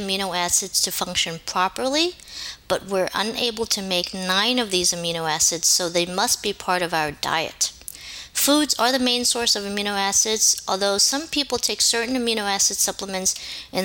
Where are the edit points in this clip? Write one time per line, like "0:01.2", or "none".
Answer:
none